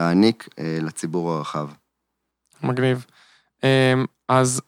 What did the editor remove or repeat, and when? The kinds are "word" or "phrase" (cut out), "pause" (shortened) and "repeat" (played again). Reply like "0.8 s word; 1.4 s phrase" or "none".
none